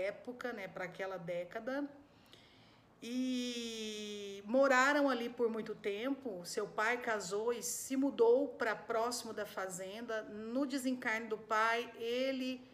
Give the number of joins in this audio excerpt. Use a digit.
0